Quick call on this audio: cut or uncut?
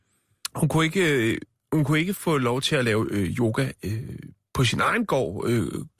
uncut